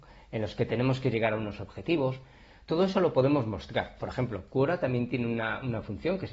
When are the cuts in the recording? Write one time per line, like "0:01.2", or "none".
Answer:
none